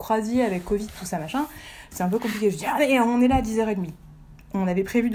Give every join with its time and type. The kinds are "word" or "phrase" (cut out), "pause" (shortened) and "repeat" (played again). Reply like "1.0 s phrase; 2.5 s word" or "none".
none